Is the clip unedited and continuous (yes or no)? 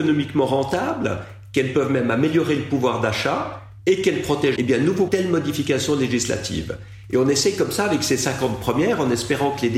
no